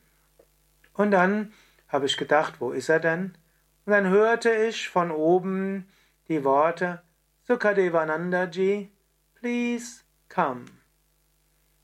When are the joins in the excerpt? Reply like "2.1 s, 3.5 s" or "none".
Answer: none